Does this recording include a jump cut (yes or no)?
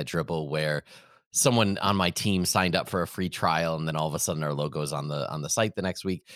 no